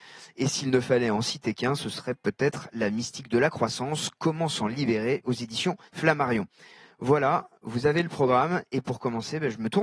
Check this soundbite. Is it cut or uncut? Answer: cut